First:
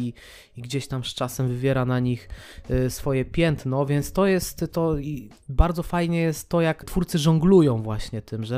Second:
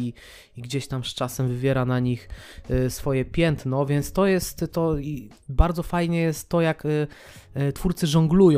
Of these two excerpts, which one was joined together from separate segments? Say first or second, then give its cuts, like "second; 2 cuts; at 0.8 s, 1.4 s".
first; 1 cut; at 6.8 s